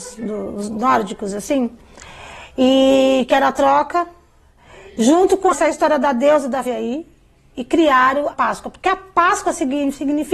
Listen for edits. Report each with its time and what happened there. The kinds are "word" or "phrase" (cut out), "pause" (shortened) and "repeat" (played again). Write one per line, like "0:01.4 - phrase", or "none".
0:05.5 - word
0:06.7 - word
0:08.3 - word